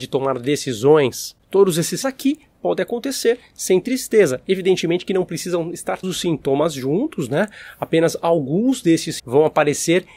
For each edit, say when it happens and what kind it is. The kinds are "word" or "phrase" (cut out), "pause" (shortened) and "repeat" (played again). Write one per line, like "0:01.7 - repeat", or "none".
0:02.0 - word
0:06.0 - word
0:09.2 - word